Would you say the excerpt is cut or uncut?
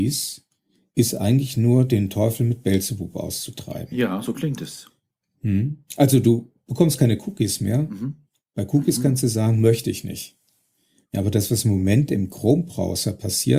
uncut